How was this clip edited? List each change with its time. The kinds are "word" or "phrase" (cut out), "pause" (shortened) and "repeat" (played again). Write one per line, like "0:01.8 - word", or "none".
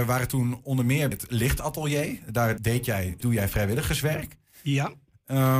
0:01.1 - word
0:02.6 - word
0:03.2 - word